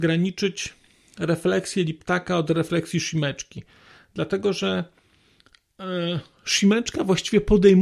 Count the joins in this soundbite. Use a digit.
0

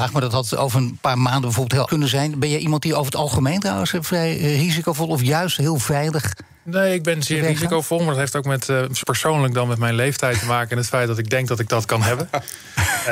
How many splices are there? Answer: 2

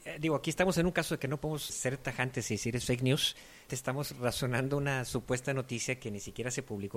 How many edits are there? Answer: 2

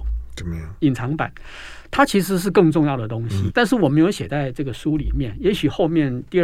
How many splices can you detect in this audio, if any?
1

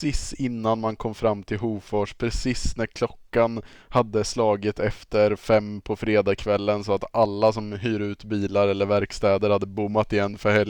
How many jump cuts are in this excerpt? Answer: 0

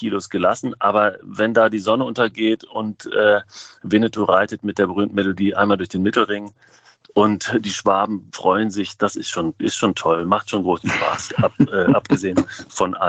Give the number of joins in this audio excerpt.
0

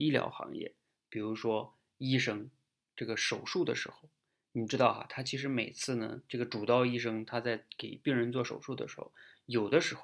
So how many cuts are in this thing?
0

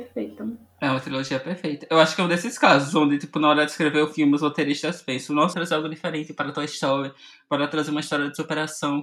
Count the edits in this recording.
1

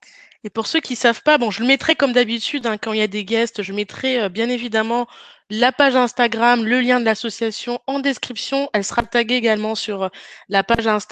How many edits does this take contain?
0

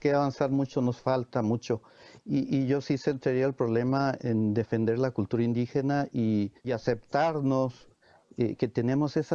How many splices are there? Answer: 2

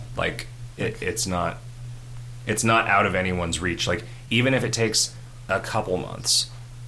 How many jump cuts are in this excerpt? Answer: 0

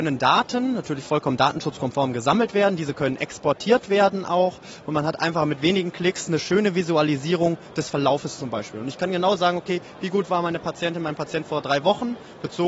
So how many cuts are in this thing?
0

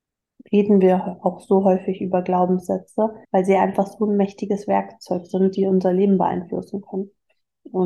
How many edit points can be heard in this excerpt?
1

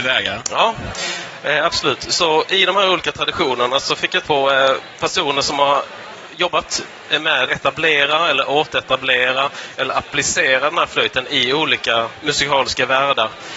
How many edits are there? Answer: 2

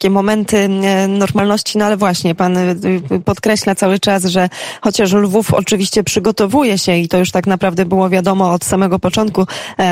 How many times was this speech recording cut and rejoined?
0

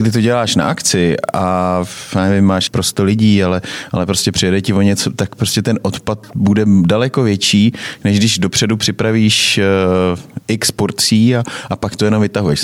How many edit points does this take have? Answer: 1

